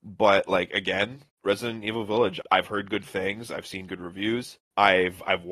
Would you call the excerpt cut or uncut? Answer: uncut